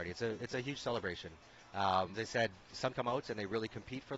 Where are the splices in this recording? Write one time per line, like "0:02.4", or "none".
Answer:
0:02.1
0:02.9

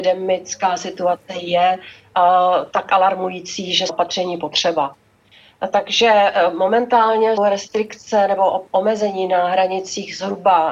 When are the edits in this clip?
0:03.9
0:07.4

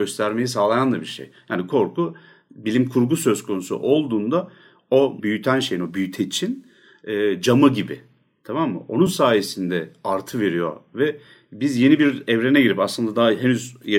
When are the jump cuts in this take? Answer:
none

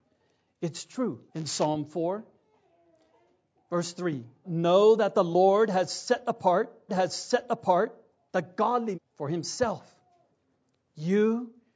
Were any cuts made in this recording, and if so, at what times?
0:01.3
0:04.4
0:06.9
0:08.9

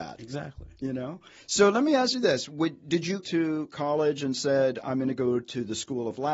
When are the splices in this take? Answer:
0:03.2

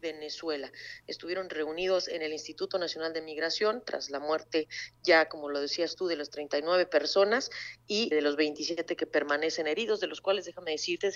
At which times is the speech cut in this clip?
0:08.1

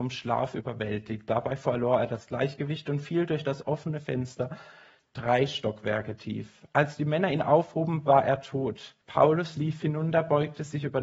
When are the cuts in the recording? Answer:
0:09.0

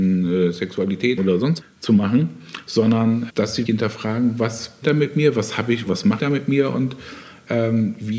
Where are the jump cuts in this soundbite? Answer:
0:01.2
0:01.6
0:03.3
0:03.7
0:04.8
0:05.9
0:06.2

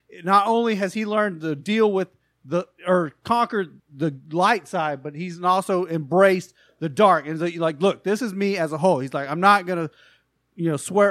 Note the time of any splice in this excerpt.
none

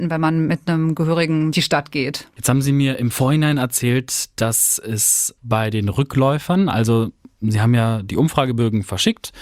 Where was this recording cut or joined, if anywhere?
0:01.5
0:05.4

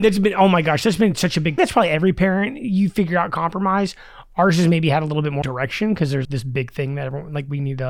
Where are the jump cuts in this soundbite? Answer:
0:01.6
0:05.4
0:06.2

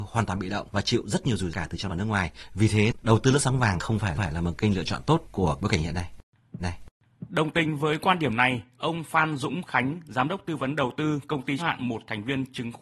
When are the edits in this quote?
0:01.5
0:01.9
0:04.2
0:06.6
0:11.6

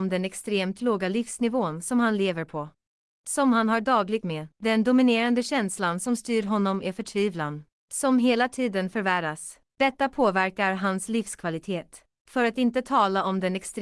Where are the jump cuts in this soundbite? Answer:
0:04.2
0:04.5
0:09.7

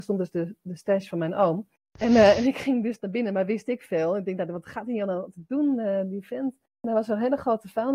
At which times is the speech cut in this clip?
none

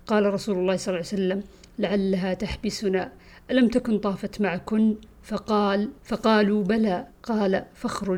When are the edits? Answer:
0:06.0
0:07.1

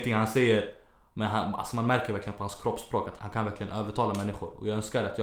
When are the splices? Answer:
0:03.2

